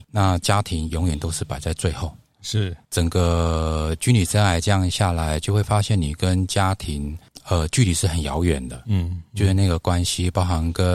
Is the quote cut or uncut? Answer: uncut